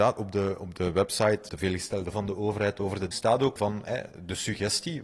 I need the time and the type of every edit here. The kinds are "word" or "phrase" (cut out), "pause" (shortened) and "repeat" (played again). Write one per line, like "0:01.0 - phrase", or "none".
0:01.5 - word
0:02.1 - word
0:03.1 - word
0:03.6 - word